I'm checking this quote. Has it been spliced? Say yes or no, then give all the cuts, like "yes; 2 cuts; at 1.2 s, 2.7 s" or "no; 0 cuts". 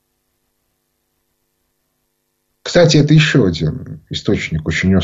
no; 0 cuts